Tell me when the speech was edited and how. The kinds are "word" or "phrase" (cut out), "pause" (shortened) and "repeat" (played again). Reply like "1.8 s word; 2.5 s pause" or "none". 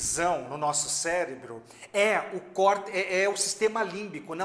none